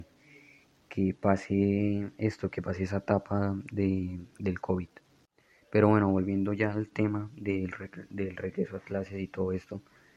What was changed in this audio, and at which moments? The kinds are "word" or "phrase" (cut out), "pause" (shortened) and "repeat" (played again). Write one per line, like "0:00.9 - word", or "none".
none